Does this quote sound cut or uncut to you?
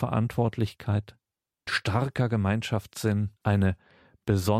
cut